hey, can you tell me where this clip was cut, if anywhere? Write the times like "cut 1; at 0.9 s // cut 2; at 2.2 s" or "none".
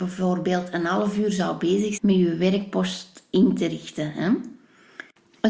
cut 1; at 2.0 s